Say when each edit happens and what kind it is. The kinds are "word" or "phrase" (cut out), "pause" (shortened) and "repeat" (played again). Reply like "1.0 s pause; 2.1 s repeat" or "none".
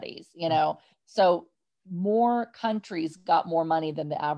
none